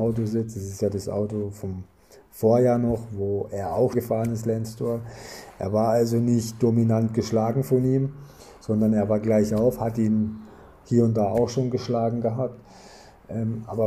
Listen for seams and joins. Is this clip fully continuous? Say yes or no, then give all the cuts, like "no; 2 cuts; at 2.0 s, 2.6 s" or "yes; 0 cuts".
no; 1 cut; at 3.9 s